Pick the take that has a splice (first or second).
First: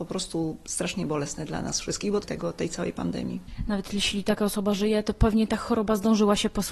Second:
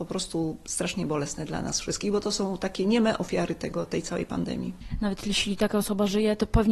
first